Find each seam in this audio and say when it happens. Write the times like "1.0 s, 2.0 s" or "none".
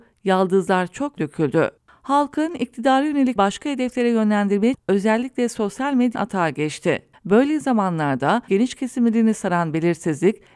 1.2 s, 1.8 s, 3.4 s, 4.7 s, 6.1 s, 7.1 s, 8.5 s